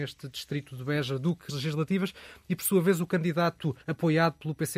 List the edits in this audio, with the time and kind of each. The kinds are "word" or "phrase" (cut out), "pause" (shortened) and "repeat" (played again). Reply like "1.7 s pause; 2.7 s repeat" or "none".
1.5 s word; 3.8 s pause